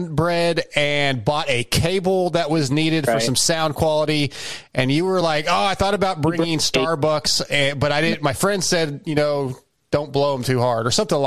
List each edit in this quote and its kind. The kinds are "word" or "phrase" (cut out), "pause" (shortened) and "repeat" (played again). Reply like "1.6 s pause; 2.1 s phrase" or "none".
none

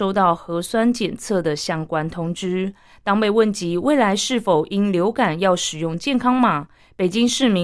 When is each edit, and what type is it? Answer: none

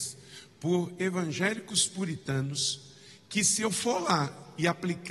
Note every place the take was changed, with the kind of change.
none

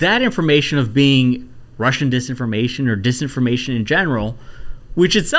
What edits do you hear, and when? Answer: none

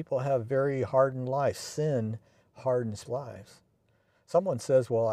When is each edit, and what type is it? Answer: 3.1 s word

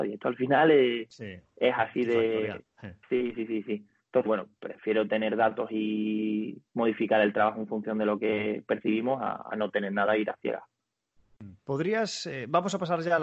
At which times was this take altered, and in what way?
3.0 s pause; 4.3 s phrase; 6.7 s pause; 11.6 s pause

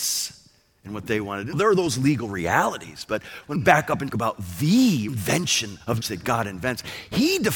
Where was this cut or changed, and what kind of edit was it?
1.5 s word; 3.6 s word; 4.1 s word; 5.1 s phrase; 6.0 s word

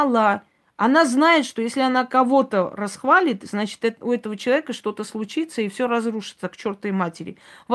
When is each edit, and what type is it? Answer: none

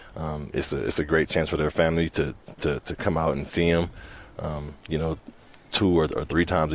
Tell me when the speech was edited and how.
none

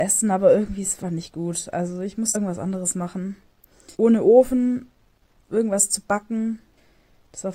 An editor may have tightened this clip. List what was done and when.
1.0 s word; 2.3 s word; 3.9 s pause

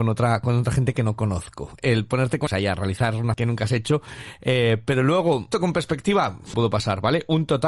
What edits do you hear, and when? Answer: 2.5 s word; 3.3 s word; 5.5 s word; 6.5 s phrase

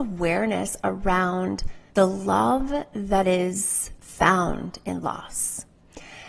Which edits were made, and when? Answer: 1.9 s pause

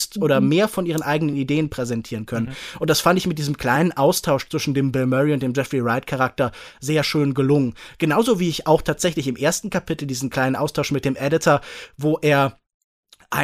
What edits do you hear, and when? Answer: none

